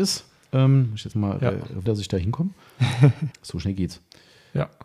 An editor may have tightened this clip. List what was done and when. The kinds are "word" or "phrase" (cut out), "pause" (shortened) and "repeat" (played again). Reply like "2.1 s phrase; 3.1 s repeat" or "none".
1.1 s word; 1.9 s word; 3.3 s word